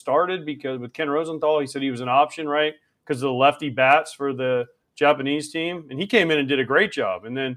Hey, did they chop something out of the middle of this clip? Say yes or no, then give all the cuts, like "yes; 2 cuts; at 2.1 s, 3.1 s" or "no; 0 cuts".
no; 0 cuts